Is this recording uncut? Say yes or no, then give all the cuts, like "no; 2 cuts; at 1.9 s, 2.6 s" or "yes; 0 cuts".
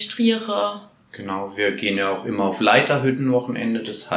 yes; 0 cuts